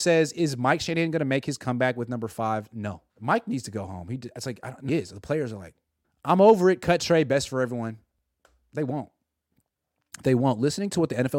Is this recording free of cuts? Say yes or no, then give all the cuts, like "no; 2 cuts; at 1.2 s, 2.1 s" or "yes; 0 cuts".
no; 3 cuts; at 3.1 s, 4.9 s, 6.0 s